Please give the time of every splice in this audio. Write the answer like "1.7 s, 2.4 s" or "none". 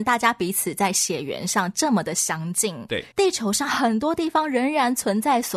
3.1 s